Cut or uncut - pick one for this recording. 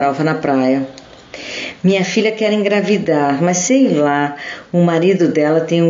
uncut